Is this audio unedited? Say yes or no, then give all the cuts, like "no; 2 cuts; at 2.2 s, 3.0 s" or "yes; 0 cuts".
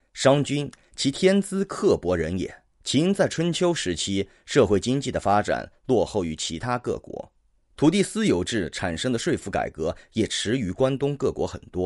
no; 2 cuts; at 2.7 s, 7.6 s